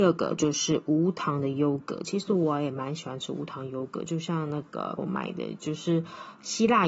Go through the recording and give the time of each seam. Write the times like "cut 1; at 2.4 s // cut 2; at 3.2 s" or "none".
cut 1; at 5.0 s